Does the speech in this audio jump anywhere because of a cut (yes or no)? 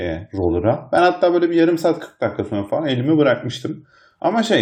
no